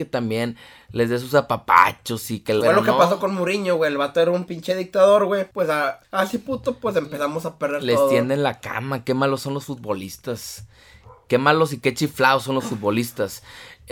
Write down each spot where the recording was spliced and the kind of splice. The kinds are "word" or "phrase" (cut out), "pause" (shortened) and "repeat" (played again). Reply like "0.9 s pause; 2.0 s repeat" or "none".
2.6 s phrase; 5.5 s pause; 6.0 s pause